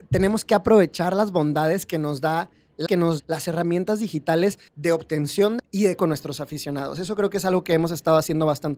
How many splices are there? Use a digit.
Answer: 5